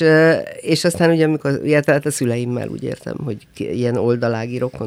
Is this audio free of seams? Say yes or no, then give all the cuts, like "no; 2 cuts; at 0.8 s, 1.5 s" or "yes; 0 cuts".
yes; 0 cuts